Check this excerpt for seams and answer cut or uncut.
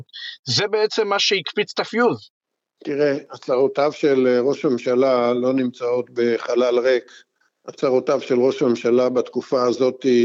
uncut